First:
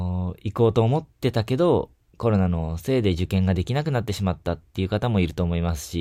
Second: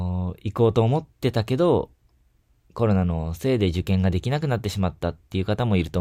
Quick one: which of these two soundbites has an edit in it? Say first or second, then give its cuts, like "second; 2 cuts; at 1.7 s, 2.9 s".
first; 1 cut; at 2.0 s